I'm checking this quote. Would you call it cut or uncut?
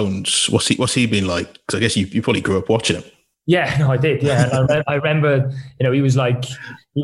uncut